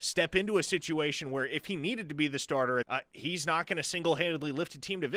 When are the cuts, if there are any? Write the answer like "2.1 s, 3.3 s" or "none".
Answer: 2.8 s